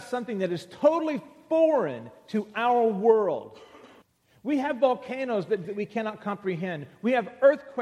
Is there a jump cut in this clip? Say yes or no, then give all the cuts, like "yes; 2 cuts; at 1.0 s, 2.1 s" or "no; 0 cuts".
yes; 2 cuts; at 4.0 s, 5.6 s